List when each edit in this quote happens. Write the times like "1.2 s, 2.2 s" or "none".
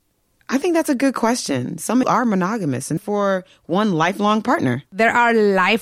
2.0 s, 3.0 s, 4.9 s